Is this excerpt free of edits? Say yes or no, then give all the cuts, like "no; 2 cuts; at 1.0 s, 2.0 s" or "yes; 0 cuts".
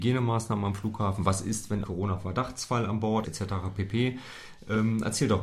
no; 2 cuts; at 1.8 s, 3.2 s